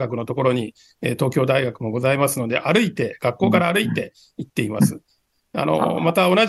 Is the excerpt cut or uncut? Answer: uncut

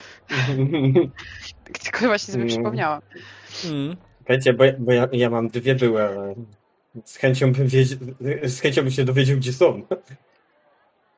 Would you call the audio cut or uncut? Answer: uncut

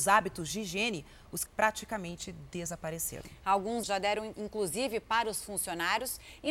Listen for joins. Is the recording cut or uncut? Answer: cut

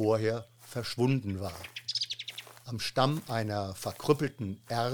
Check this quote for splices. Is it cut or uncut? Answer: uncut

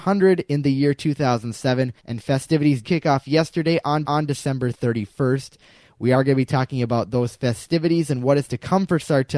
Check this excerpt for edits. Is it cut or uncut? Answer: cut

